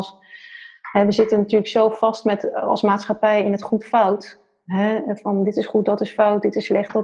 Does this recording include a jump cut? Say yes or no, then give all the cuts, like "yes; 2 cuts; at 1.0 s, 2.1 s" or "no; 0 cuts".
no; 0 cuts